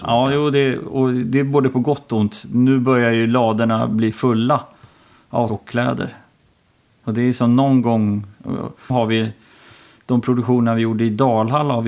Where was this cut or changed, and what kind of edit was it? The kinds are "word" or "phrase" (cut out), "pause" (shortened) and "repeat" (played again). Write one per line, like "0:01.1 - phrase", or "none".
0:05.5 - word
0:08.9 - word